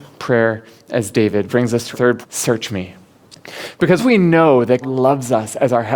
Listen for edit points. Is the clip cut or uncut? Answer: cut